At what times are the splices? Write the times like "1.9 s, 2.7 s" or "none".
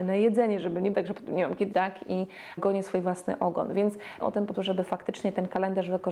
0.9 s, 1.7 s, 2.6 s, 4.2 s, 4.5 s